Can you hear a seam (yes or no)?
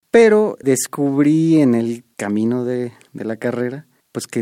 no